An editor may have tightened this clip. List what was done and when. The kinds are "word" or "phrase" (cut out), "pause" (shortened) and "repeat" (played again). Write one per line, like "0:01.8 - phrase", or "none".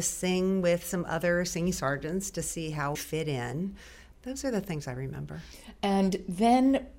0:02.9 - word